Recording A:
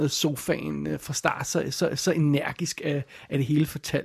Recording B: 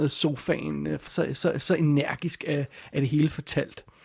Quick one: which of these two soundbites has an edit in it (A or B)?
B